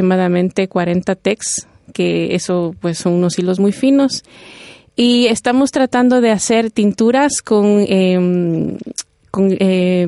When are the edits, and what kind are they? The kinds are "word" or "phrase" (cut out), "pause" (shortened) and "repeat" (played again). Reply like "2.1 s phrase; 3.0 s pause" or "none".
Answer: none